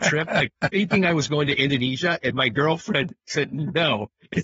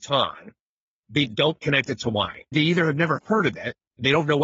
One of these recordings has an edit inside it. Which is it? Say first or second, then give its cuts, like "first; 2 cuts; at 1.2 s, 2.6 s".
second; 1 cut; at 2.5 s